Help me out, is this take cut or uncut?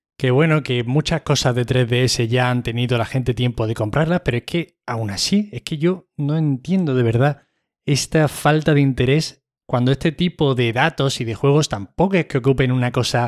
uncut